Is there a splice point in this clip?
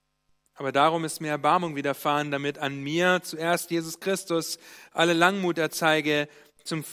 no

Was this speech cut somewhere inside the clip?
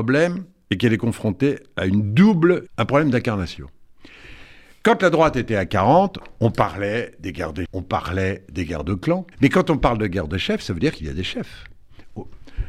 yes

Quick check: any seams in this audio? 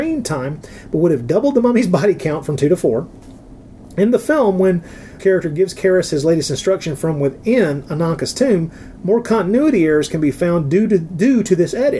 yes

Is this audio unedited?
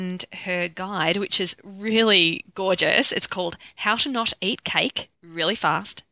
no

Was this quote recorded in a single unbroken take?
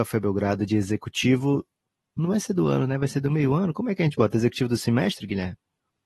yes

